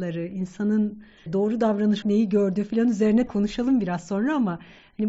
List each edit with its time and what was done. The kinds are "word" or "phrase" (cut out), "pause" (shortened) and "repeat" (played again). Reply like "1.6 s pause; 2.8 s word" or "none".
1.3 s word; 2.0 s word; 3.3 s word